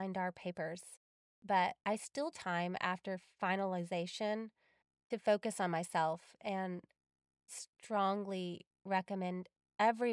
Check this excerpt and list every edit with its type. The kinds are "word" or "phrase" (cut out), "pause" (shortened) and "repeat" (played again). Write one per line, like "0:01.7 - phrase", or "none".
0:01.8 - pause
0:02.3 - phrase
0:07.5 - word